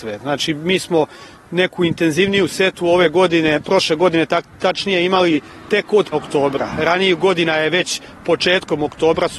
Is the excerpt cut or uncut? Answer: cut